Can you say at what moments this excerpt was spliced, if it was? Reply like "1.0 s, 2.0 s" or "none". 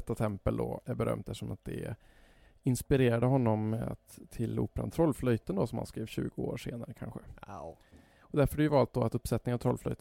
none

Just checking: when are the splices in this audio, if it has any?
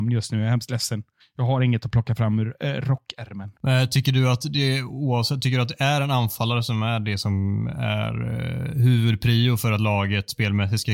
1.2 s, 3.6 s

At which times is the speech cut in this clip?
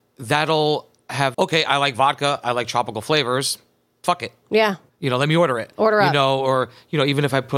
1.3 s

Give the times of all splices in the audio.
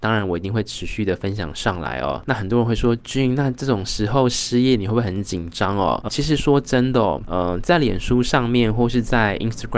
6.1 s

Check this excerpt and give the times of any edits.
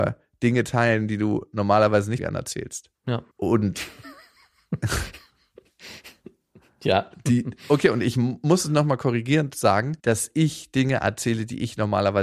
2.2 s, 3.3 s, 10.0 s

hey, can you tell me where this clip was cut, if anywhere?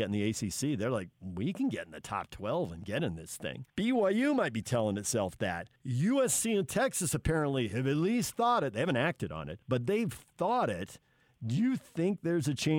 3.7 s, 5.8 s, 9.6 s

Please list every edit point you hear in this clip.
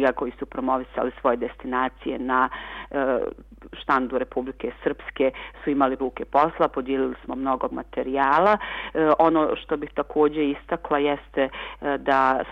6.0 s, 7.7 s

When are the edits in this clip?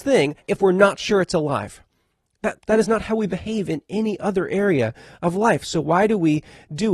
2.6 s

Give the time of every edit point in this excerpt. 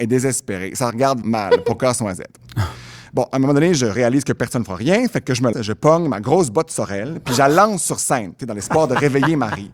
1.2 s, 5.5 s

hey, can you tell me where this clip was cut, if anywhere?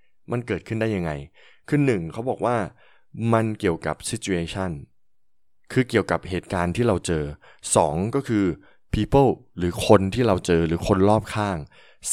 none

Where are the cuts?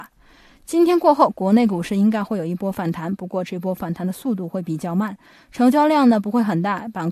none

